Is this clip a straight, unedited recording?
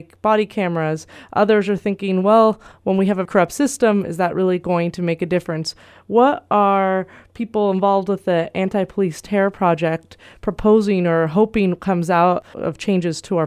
no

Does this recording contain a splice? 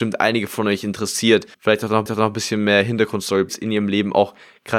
yes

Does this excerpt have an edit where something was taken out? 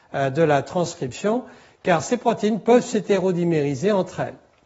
no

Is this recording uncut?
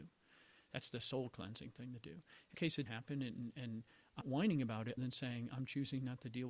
no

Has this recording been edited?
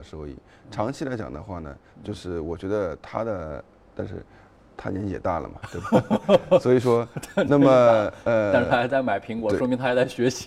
yes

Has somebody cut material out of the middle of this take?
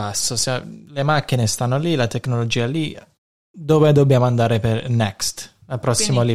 no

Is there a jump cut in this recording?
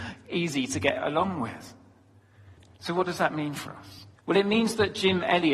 yes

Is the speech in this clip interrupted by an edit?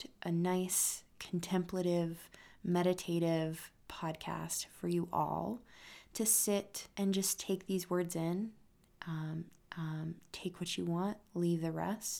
yes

